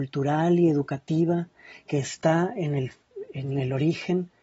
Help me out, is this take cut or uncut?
uncut